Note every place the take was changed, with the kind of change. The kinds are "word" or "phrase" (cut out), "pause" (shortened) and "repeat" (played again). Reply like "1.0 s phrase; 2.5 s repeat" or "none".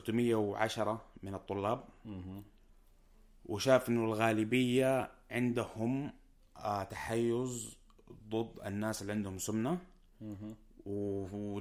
none